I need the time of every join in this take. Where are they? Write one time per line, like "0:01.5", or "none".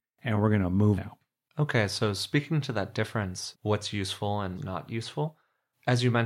0:01.0
0:03.5
0:04.6